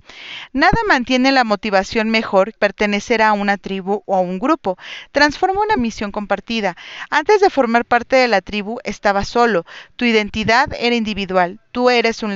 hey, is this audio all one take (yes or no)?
no